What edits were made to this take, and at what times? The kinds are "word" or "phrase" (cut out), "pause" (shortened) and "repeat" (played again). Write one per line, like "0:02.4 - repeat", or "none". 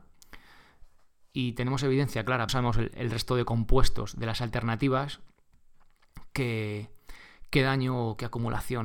0:02.5 - phrase